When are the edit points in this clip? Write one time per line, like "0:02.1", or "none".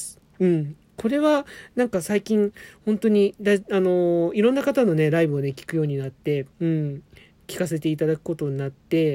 0:06.5